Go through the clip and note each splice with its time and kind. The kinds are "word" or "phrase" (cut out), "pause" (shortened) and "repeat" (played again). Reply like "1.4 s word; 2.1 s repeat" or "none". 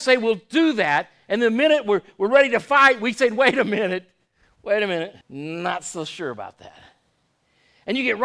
5.2 s pause